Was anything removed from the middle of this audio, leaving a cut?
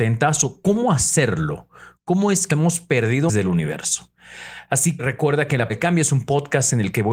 yes; 4 cuts; at 2.5 s, 3.3 s, 5.0 s, 5.7 s

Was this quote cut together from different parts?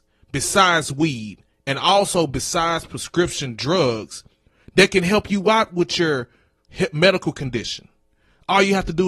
no; 0 cuts

